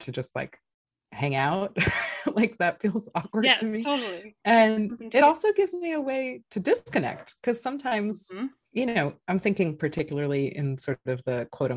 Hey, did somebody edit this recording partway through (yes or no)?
no